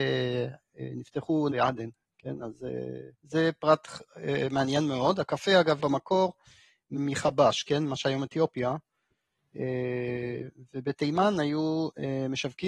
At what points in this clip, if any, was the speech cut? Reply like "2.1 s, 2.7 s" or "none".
1.5 s, 3.1 s, 5.8 s, 7.0 s